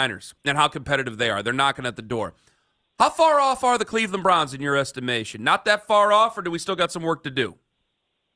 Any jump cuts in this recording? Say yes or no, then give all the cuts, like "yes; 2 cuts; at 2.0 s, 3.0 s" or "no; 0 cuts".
no; 0 cuts